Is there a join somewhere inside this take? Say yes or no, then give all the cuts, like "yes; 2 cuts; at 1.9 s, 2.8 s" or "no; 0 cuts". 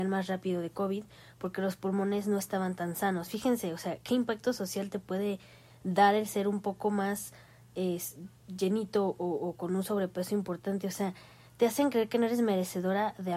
no; 0 cuts